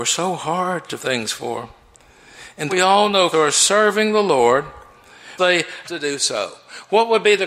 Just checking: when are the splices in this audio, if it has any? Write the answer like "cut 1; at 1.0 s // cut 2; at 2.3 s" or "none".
cut 1; at 1.0 s // cut 2; at 2.7 s // cut 3; at 3.3 s // cut 4; at 5.4 s // cut 5; at 5.8 s